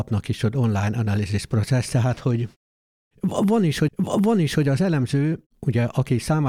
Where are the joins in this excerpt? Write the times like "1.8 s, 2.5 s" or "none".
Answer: 3.9 s